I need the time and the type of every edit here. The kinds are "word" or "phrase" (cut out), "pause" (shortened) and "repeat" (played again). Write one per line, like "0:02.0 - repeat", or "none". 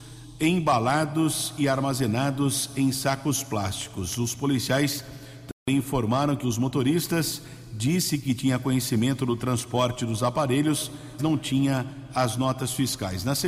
0:06.4 - word
0:11.2 - word